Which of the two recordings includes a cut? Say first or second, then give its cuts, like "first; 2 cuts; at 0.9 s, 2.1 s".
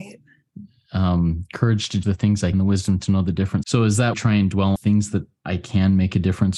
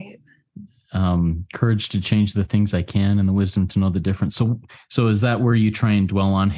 first; 5 cuts; at 2.0 s, 2.5 s, 3.6 s, 4.1 s, 4.8 s